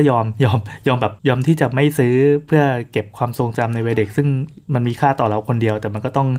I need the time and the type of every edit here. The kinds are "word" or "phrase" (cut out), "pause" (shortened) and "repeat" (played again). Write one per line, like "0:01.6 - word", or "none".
0:01.2 - pause